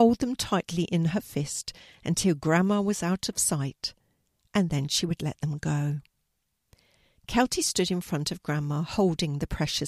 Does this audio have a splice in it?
no; 0 cuts

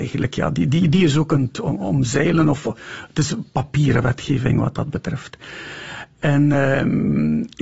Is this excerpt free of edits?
yes; 0 cuts

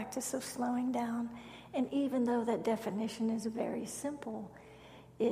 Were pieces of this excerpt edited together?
no; 0 cuts

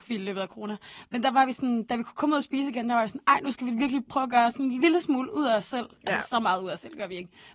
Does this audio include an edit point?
no; 0 cuts

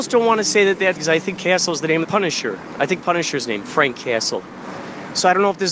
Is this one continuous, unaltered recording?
no; 4 cuts; at 1.0 s, 1.4 s, 2.0 s, 3.0 s

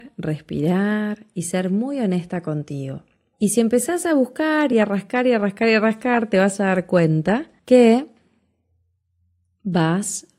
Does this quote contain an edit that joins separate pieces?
no; 0 cuts

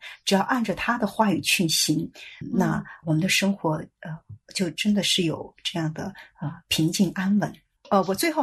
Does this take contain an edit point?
yes; 2 cuts; at 2.4 s, 3.0 s

